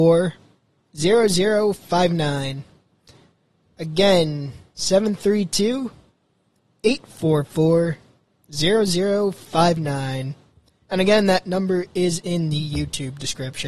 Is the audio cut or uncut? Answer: uncut